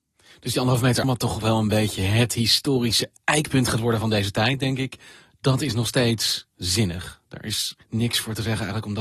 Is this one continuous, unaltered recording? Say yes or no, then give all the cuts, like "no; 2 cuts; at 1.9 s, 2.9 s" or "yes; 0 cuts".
no; 2 cuts; at 1.0 s, 7.8 s